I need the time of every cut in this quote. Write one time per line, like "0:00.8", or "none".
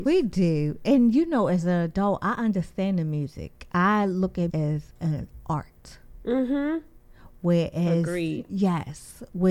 0:04.5